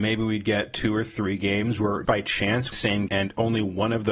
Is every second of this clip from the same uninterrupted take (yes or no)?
no